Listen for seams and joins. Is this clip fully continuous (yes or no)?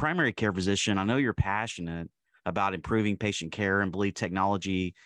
yes